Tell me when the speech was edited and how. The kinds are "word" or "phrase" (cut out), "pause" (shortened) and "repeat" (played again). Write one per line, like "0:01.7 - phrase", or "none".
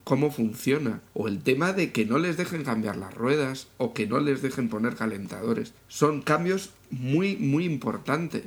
0:01.1 - pause
0:05.8 - pause